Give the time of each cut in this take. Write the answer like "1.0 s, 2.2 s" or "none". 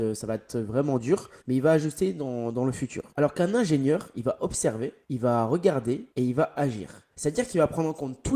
1.4 s, 3.1 s, 5.0 s, 6.1 s, 7.1 s